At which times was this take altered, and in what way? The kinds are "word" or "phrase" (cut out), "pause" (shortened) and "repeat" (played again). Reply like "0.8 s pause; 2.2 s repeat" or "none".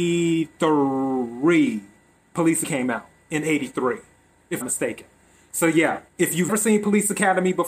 2.6 s word; 4.6 s phrase; 6.1 s pause; 6.5 s word